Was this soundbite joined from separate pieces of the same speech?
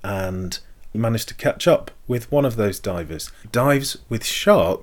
yes; 2 cuts; at 0.9 s, 3.4 s

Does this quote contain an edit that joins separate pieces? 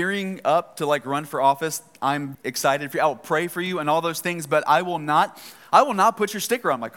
yes; 1 cut; at 2.3 s

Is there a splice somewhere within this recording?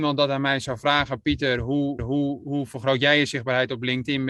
yes; 1 cut; at 2.0 s

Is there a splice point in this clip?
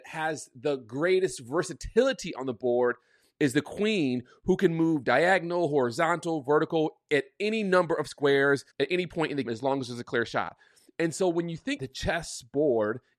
yes; 3 cuts; at 8.7 s, 9.5 s, 11.8 s

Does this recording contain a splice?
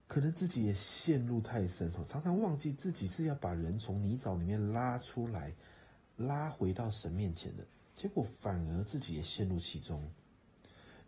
no; 0 cuts

